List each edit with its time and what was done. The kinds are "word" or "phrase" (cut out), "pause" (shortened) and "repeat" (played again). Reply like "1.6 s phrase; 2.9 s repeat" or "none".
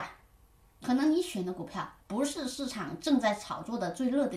2.0 s pause